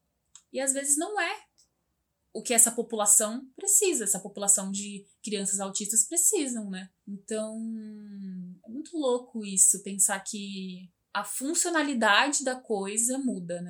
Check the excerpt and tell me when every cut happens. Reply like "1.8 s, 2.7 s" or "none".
7.0 s, 11.0 s